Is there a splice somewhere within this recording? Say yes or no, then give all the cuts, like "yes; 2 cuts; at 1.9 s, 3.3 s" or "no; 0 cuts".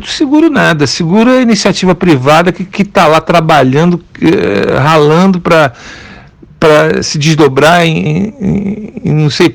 yes; 1 cut; at 8.1 s